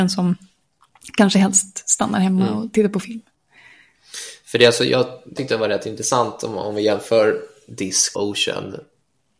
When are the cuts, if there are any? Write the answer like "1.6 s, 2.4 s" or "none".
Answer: 5.4 s, 8.1 s